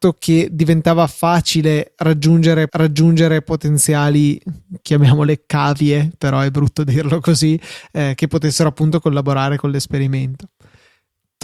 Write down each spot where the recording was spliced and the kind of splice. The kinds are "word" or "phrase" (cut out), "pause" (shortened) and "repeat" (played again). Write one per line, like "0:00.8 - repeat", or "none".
0:02.7 - repeat